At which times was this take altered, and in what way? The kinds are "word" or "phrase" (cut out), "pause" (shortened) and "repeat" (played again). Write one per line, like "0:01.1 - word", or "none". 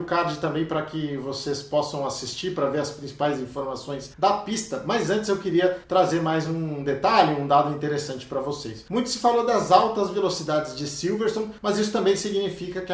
none